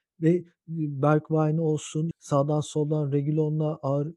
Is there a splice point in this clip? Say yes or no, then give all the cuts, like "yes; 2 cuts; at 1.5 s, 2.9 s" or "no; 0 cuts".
yes; 1 cut; at 2.1 s